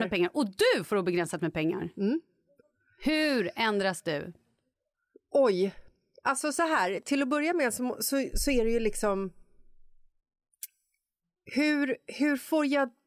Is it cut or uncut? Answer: uncut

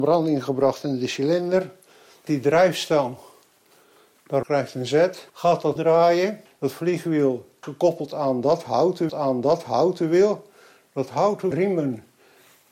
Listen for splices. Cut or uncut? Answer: cut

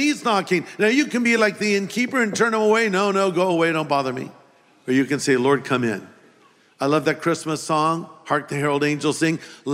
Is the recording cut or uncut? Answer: uncut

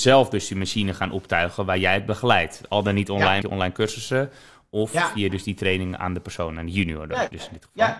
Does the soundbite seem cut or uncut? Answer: cut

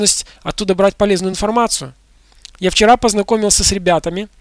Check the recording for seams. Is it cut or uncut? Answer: uncut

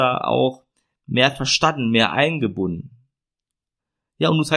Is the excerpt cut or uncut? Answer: uncut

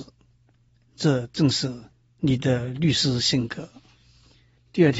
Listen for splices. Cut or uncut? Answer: uncut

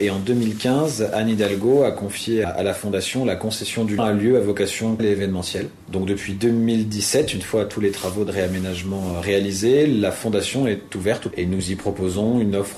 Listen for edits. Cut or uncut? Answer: cut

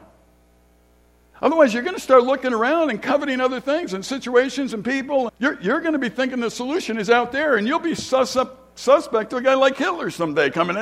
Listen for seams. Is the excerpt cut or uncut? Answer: cut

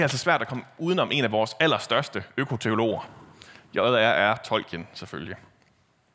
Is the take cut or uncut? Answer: uncut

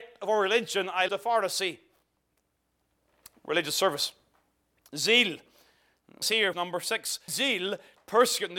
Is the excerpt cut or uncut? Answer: cut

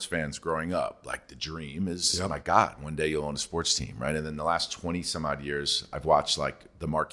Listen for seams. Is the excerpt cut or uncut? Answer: uncut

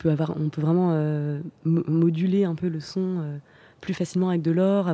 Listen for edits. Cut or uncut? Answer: uncut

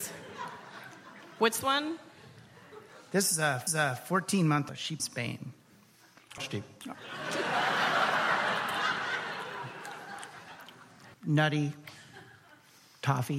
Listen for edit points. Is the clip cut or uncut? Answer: cut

